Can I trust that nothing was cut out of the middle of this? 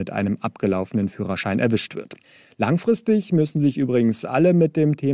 yes; 0 cuts

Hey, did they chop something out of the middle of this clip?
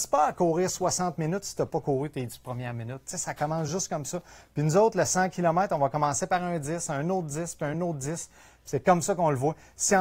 no; 0 cuts

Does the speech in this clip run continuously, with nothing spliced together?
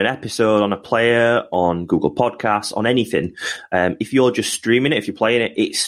yes; 0 cuts

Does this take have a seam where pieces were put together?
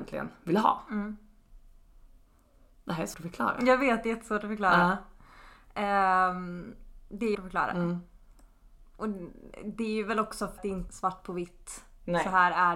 yes; 4 cuts; at 3.1 s, 7.3 s, 10.6 s, 10.9 s

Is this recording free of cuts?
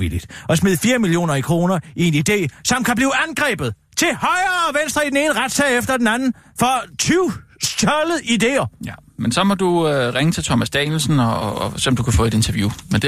no; 1 cut; at 11.4 s

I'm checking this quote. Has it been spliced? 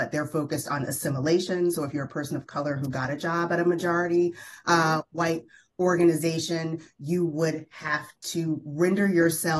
no; 0 cuts

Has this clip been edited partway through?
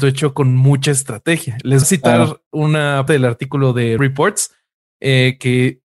yes; 3 cuts; at 1.8 s, 3.1 s, 4.0 s

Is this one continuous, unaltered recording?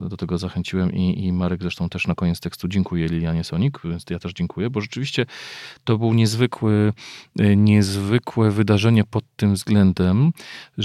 yes; 0 cuts

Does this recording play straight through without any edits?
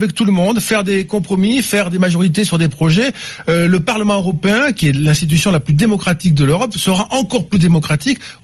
yes; 0 cuts

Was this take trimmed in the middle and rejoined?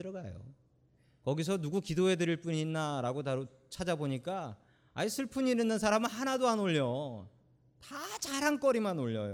no; 0 cuts

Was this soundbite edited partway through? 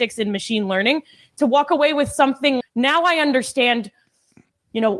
yes; 1 cut; at 2.6 s

